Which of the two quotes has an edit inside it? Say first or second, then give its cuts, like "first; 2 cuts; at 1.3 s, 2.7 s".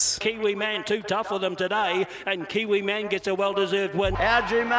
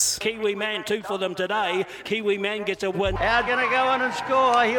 second; 4 cuts; at 1.0 s, 2.0 s, 2.9 s, 3.5 s